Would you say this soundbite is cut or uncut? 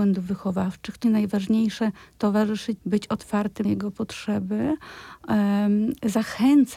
cut